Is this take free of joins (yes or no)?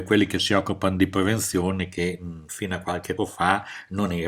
no